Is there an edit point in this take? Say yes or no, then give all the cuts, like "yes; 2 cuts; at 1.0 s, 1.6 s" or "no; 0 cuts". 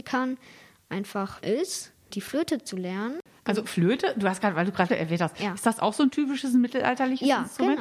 yes; 3 cuts; at 1.4 s, 2.1 s, 4.9 s